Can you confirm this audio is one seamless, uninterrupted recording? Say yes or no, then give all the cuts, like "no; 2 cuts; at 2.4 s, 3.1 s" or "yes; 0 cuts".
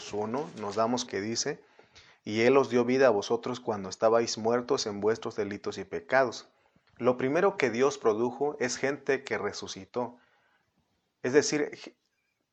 no; 1 cut; at 1.1 s